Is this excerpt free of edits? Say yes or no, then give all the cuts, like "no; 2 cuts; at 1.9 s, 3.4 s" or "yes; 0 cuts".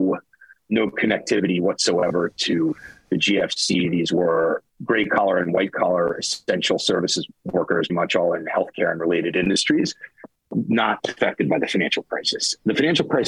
no; 1 cut; at 7.9 s